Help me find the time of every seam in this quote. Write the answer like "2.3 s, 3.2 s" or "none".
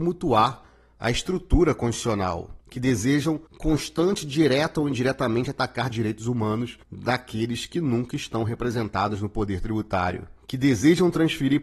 2.6 s, 3.5 s, 6.8 s, 10.4 s